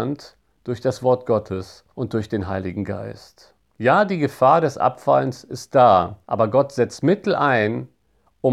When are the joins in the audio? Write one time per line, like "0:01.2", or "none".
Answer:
0:01.9
0:06.2

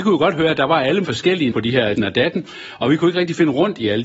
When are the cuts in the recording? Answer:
0:01.0
0:01.5
0:02.0

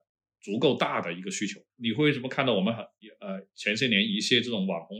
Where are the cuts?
0:01.7

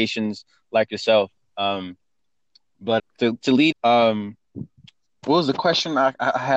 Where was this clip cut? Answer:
0:03.0
0:03.7

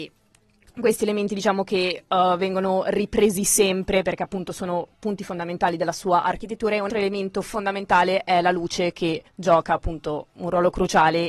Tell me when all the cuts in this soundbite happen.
0:06.9
0:09.3

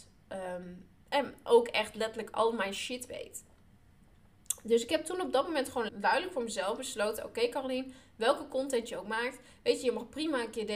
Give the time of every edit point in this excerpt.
0:00.9
0:05.9

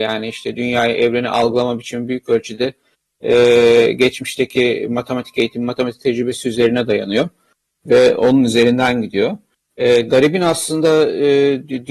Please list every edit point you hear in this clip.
none

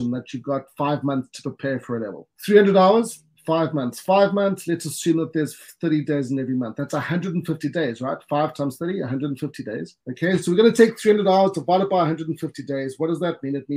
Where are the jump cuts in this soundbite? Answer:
0:02.3
0:10.0

